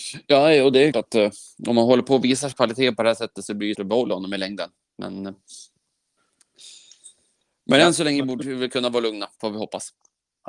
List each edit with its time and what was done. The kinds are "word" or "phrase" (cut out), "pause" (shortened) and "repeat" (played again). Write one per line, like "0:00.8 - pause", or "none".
0:00.9 - word
0:02.5 - word
0:03.7 - word